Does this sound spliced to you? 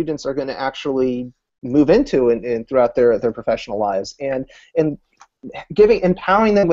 no; 0 cuts

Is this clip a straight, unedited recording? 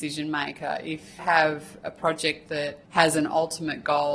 no; 2 cuts; at 1.2 s, 2.8 s

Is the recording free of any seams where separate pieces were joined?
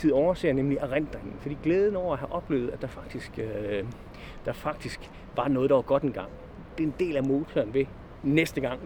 yes; 0 cuts

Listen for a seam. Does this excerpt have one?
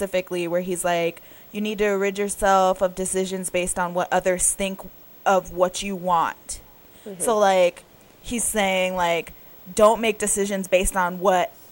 no; 0 cuts

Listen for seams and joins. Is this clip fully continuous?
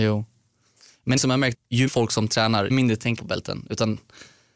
no; 5 cuts; at 1.2 s, 1.5 s, 1.9 s, 2.7 s, 3.2 s

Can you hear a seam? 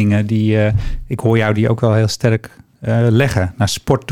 no; 0 cuts

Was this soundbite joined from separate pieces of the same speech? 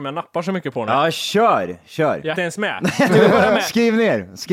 yes; 2 cuts; at 2.3 s, 3.1 s

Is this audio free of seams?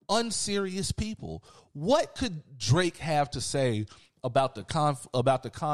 yes; 0 cuts

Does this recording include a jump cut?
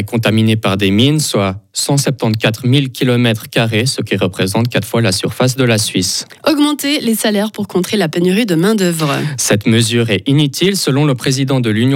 no; 0 cuts

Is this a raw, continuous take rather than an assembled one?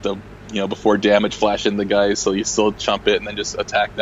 yes; 0 cuts

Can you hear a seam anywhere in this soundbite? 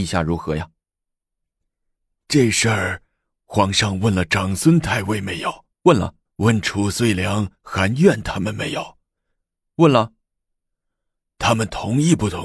yes; 2 cuts; at 5.7 s, 6.3 s

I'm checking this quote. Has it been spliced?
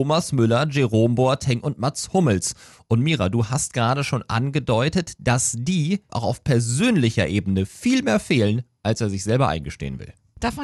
yes; 1 cut; at 6.1 s

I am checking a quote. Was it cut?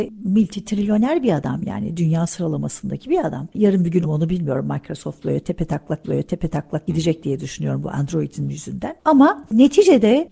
yes; 2 cuts; at 4.0 s, 6.0 s

